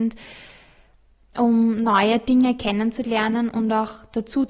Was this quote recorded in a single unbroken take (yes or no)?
yes